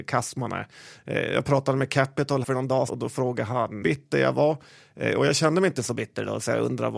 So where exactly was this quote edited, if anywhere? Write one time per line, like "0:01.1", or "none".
0:02.4
0:02.9
0:03.8